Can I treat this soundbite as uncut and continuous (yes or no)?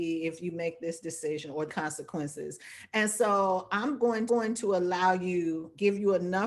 no